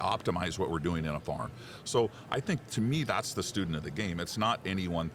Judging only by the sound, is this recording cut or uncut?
uncut